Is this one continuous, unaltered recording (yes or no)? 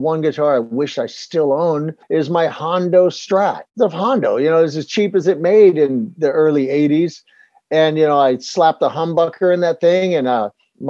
no